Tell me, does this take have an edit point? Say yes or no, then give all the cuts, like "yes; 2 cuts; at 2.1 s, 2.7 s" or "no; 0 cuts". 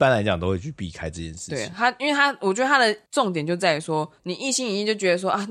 yes; 1 cut; at 4.2 s